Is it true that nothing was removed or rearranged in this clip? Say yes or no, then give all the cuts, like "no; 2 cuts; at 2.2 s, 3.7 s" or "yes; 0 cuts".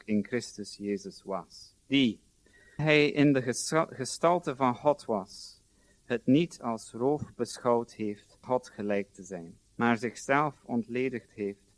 no; 3 cuts; at 2.8 s, 8.4 s, 9.6 s